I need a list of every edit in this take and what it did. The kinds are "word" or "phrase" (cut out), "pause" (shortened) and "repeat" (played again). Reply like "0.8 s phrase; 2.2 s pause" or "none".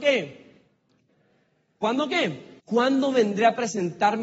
2.6 s pause